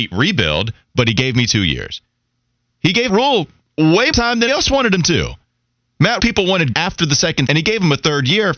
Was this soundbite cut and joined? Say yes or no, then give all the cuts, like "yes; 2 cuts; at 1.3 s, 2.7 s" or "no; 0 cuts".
yes; 6 cuts; at 3.1 s, 4.1 s, 4.5 s, 6.2 s, 6.7 s, 7.5 s